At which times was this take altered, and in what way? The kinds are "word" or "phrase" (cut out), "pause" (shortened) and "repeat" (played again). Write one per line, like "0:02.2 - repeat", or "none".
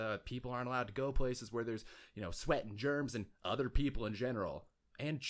none